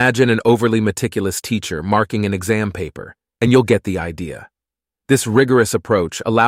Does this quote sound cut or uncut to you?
uncut